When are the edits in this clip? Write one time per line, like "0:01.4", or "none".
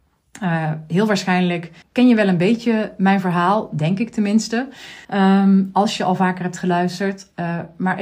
0:01.8
0:05.0